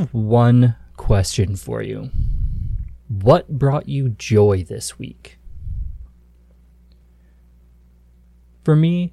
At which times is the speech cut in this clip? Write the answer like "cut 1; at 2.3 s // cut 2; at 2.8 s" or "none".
cut 1; at 3.0 s